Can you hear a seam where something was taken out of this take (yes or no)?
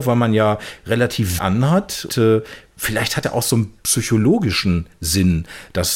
yes